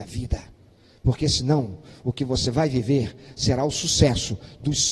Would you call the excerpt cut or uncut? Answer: uncut